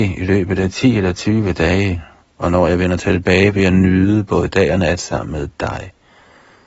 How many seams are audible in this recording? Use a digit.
0